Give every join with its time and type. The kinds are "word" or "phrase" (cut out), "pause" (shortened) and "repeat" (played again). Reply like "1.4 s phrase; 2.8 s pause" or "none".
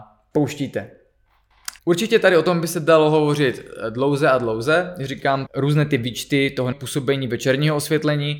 1.8 s pause; 5.5 s word; 6.7 s word